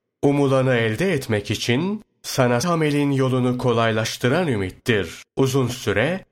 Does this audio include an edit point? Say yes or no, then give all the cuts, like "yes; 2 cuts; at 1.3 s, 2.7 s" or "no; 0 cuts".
yes; 2 cuts; at 2.6 s, 5.3 s